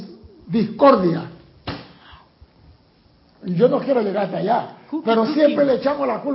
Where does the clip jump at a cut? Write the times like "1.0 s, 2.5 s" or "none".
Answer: none